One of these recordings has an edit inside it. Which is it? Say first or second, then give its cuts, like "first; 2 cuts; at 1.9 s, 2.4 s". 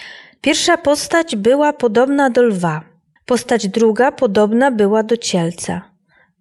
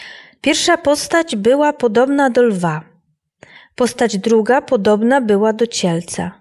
first; 1 cut; at 3.2 s